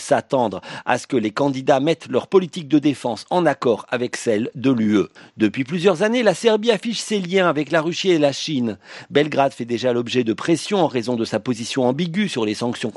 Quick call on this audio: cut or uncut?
cut